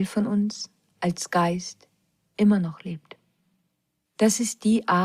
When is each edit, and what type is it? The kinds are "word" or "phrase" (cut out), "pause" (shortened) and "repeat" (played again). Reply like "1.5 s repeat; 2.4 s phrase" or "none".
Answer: none